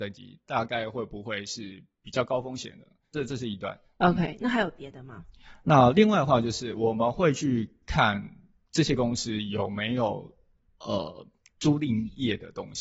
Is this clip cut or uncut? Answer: uncut